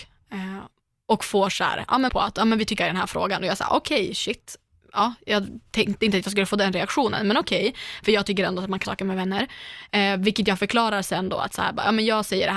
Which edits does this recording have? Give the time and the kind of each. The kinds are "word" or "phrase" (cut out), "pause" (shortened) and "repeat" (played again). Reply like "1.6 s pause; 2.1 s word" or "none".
2.1 s word; 2.8 s word; 8.8 s word